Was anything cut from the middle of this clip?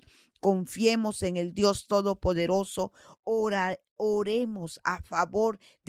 no; 0 cuts

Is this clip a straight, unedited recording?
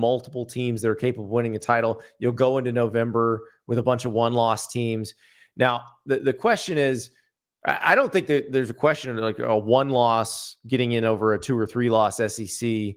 yes; 0 cuts

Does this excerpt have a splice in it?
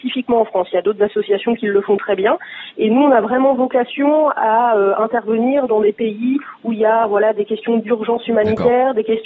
no; 0 cuts

